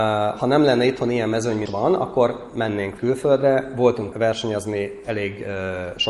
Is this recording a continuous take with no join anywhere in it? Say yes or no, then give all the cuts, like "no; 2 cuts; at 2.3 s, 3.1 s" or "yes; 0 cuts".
no; 3 cuts; at 1.7 s, 3.0 s, 4.1 s